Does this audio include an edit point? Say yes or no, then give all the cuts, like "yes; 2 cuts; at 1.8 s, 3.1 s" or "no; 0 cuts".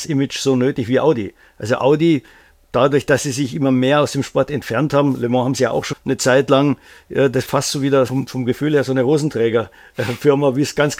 yes; 3 cuts; at 5.9 s, 7.5 s, 8.1 s